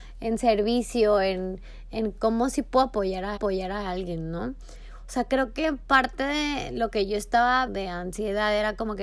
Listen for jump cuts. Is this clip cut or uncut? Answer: cut